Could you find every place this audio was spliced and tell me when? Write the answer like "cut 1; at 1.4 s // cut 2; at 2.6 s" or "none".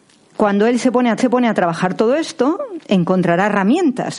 cut 1; at 1.2 s